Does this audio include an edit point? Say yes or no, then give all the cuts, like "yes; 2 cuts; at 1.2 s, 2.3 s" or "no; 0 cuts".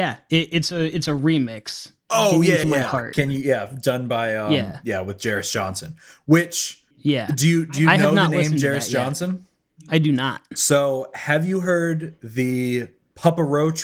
yes; 2 cuts; at 2.6 s, 6.9 s